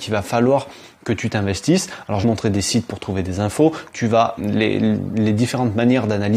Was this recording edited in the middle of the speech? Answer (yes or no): yes